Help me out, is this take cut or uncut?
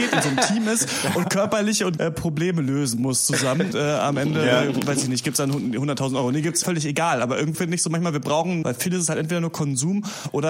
cut